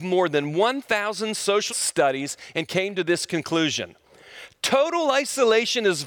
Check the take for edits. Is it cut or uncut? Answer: cut